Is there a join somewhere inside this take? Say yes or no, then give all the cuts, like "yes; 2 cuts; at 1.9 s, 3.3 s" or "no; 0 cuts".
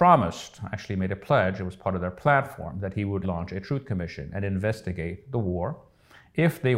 yes; 1 cut; at 3.2 s